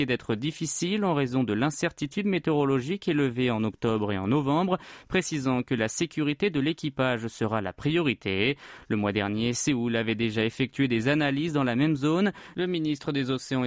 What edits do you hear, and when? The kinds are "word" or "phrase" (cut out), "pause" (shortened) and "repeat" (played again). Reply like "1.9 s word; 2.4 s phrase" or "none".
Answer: none

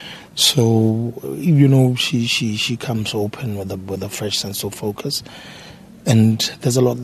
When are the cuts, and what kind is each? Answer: none

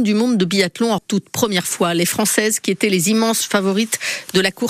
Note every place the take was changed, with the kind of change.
1.0 s phrase

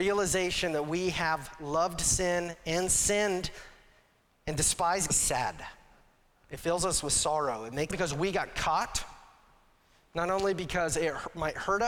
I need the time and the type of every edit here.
4.2 s pause; 5.1 s phrase; 7.9 s phrase

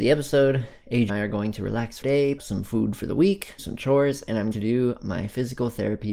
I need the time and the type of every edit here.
1.1 s word; 2.0 s word; 2.4 s word; 3.6 s word; 4.5 s word

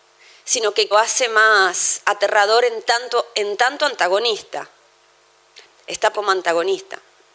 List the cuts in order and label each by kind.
0.9 s phrase; 6.1 s word

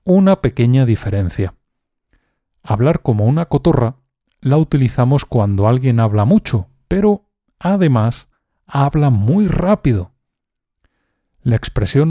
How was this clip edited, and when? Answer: none

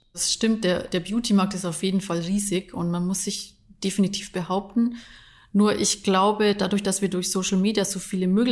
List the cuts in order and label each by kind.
none

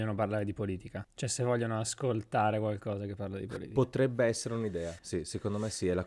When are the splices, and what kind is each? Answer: 5.0 s word

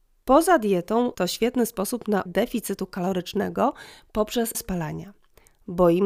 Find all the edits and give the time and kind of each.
1.1 s word; 2.3 s word; 4.5 s word

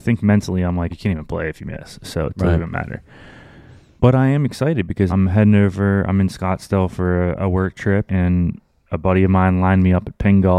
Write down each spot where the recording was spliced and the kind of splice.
0.9 s word; 5.1 s word; 8.1 s word

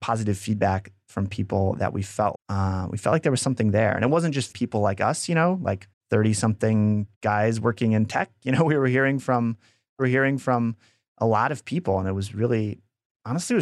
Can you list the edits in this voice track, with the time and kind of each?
2.3 s word; 4.5 s phrase; 5.9 s pause; 7.1 s pause; 10.0 s repeat

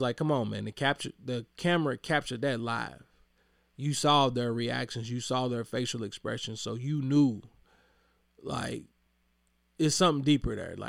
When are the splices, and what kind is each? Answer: none

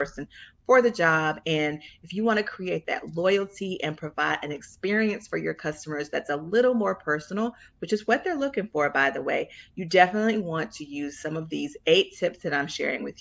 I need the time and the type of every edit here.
none

